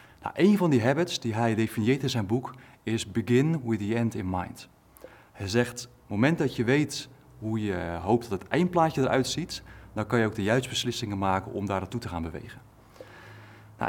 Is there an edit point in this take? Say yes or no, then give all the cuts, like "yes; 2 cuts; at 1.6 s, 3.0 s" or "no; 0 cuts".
no; 0 cuts